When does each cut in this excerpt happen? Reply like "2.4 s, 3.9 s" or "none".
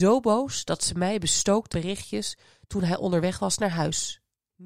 1.7 s